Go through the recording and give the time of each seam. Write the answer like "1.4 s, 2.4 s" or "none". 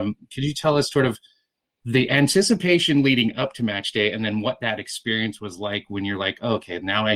0.9 s, 1.7 s